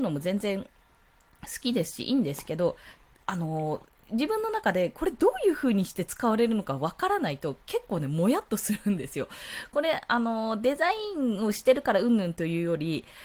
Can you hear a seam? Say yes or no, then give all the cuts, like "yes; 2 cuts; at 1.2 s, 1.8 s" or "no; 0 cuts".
no; 0 cuts